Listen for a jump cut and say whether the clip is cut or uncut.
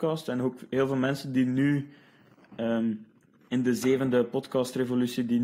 uncut